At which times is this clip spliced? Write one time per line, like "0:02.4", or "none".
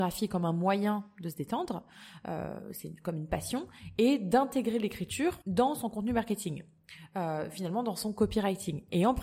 0:05.4